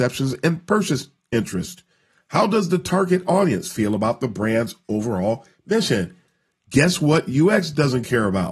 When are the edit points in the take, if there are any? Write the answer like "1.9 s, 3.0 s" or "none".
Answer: none